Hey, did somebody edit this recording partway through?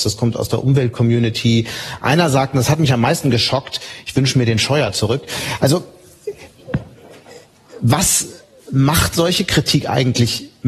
no; 0 cuts

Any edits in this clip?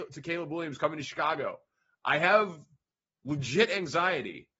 no; 0 cuts

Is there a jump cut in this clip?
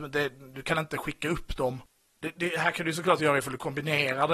no; 0 cuts

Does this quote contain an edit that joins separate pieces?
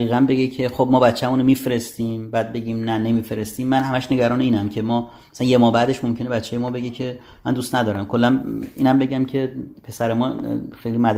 no; 0 cuts

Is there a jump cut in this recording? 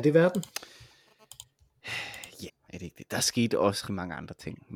yes; 2 cuts; at 2.5 s, 3.9 s

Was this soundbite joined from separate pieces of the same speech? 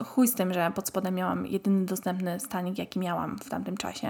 no; 0 cuts

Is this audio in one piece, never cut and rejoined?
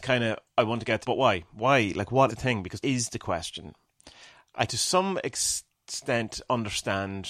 no; 4 cuts; at 1.0 s, 2.3 s, 2.8 s, 4.7 s

